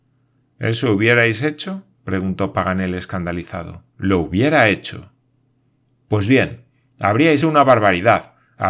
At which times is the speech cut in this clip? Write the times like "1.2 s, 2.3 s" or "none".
3.9 s, 7.4 s